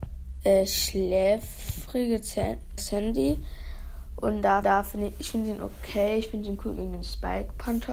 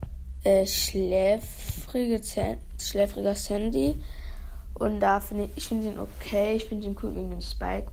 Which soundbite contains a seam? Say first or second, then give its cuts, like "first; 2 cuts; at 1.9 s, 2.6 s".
first; 2 cuts; at 2.8 s, 4.6 s